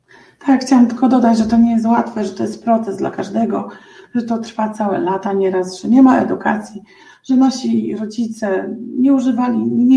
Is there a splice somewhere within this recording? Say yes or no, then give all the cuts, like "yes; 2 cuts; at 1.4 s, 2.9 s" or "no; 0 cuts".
no; 0 cuts